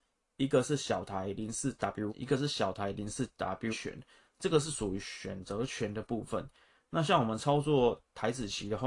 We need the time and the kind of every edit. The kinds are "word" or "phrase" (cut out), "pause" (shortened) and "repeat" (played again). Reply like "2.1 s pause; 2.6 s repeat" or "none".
2.1 s word; 3.7 s word